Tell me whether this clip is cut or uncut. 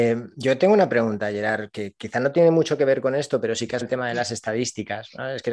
cut